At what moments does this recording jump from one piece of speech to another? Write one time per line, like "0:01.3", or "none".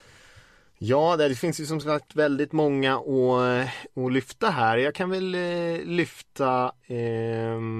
none